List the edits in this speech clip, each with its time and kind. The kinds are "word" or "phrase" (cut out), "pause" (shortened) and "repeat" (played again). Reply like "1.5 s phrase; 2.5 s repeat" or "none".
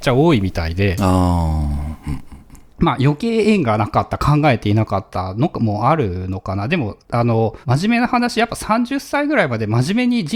2.7 s pause; 7.0 s pause; 7.6 s pause